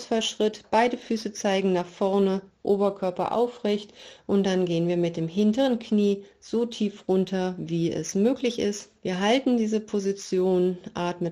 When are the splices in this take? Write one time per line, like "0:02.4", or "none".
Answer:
0:09.0